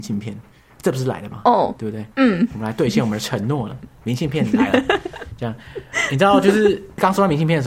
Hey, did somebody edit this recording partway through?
yes; 1 cut; at 2.1 s

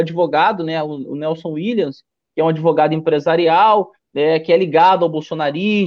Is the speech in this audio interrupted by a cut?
no; 0 cuts

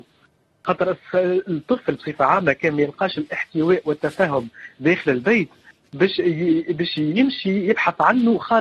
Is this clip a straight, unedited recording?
yes; 0 cuts

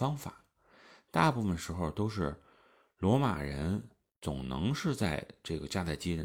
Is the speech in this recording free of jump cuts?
yes; 0 cuts

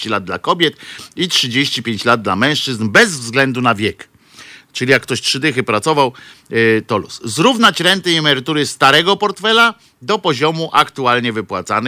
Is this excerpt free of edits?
yes; 0 cuts

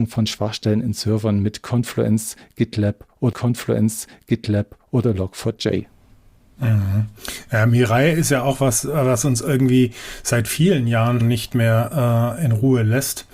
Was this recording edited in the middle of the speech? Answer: yes; 2 cuts; at 3.3 s, 11.2 s

